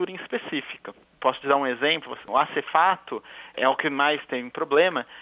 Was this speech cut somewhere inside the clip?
no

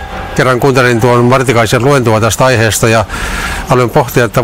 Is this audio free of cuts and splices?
yes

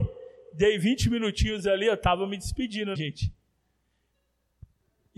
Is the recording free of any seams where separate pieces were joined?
no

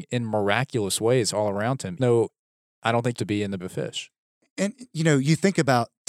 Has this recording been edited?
yes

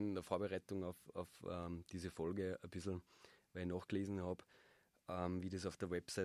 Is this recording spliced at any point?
no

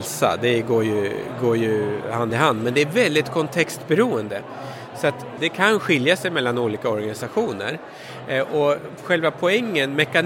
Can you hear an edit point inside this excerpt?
no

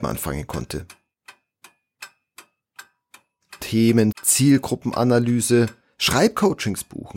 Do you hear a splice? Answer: yes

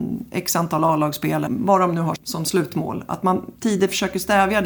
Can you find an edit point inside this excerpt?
yes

